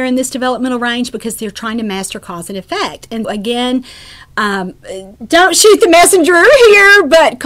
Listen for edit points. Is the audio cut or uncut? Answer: cut